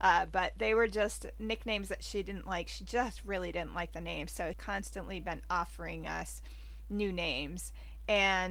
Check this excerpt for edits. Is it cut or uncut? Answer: cut